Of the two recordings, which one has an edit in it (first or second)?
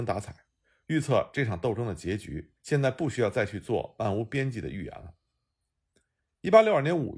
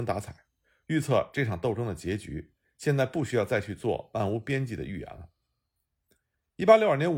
first